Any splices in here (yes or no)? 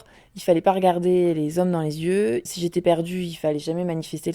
no